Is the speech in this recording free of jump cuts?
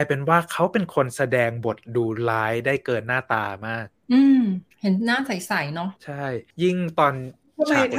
no; 3 cuts; at 4.7 s, 6.0 s, 6.5 s

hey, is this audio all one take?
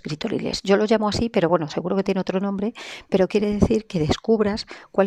yes; 0 cuts

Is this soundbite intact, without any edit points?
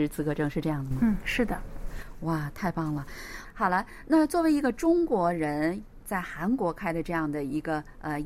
no; 1 cut; at 6.0 s

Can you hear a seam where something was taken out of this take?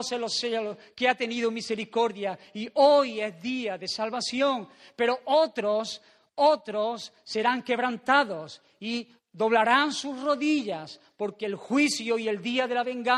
no; 0 cuts

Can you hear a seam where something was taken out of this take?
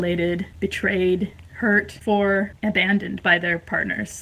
yes; 2 cuts; at 2.0 s, 2.6 s

